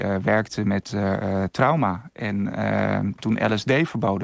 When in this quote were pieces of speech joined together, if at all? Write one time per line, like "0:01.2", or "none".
none